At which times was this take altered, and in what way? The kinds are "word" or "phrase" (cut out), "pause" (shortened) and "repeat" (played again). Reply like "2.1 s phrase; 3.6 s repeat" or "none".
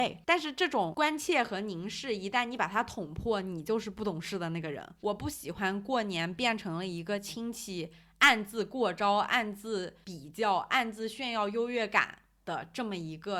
none